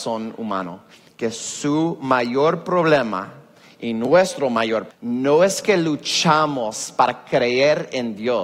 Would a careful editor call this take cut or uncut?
cut